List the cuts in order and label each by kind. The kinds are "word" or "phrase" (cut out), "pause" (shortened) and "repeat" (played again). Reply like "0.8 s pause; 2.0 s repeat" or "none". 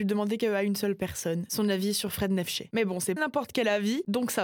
3.2 s word